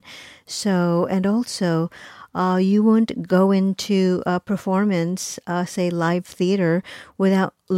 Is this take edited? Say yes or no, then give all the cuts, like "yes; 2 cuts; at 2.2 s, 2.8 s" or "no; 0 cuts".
no; 0 cuts